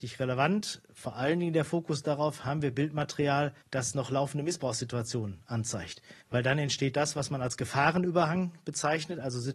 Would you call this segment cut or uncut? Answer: cut